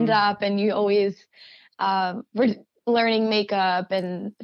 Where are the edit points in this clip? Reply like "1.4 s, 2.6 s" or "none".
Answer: none